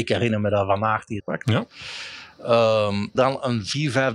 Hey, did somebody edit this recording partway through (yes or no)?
yes